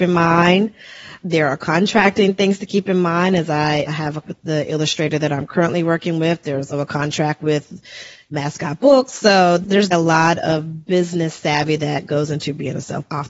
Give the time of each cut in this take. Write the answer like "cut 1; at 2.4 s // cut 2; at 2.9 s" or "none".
cut 1; at 3.9 s // cut 2; at 4.2 s // cut 3; at 6.7 s // cut 4; at 9.9 s